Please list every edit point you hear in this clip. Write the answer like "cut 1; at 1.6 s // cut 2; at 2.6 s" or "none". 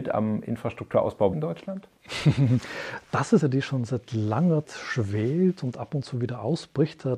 cut 1; at 1.3 s // cut 2; at 3.4 s // cut 3; at 4.6 s